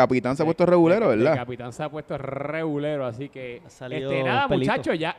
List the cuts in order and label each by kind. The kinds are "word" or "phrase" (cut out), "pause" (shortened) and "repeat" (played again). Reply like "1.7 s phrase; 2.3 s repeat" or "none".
none